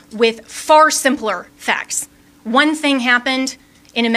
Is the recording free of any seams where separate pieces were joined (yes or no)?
yes